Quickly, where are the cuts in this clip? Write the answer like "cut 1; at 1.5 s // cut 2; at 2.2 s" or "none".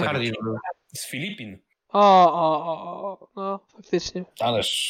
cut 1; at 1.8 s